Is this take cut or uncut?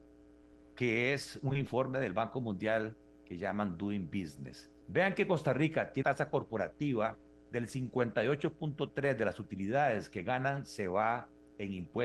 cut